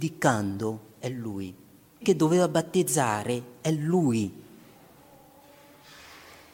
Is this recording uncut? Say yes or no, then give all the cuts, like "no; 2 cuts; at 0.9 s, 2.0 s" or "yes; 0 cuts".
no; 1 cut; at 2.0 s